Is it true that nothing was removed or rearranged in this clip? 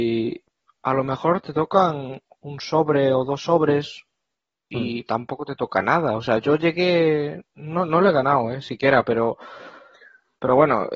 yes; 0 cuts

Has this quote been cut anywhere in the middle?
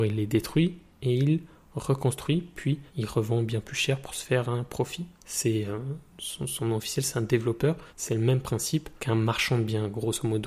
yes; 5 cuts; at 2.9 s, 5.1 s, 6.1 s, 7.9 s, 9.0 s

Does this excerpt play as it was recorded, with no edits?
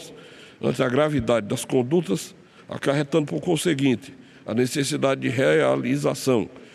yes; 0 cuts

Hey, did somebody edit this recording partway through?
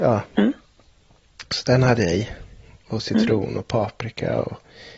no; 0 cuts

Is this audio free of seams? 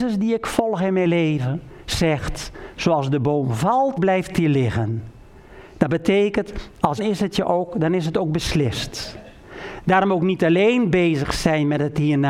no; 2 cuts; at 4.0 s, 7.0 s

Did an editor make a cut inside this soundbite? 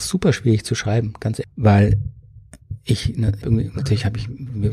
yes; 2 cuts; at 1.4 s, 3.4 s

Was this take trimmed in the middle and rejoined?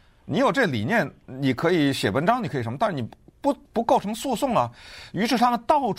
yes; 1 cut; at 3.6 s

